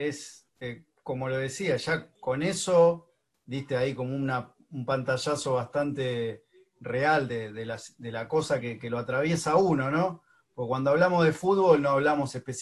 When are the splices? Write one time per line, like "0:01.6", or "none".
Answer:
none